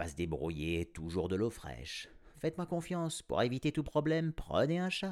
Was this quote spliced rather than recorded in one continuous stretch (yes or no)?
no